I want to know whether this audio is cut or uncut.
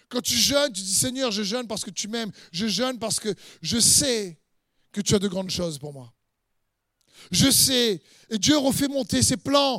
uncut